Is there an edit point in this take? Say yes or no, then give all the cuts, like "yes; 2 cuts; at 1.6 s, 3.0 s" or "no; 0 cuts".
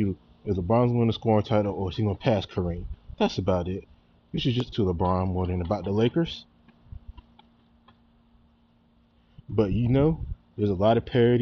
yes; 1 cut; at 4.7 s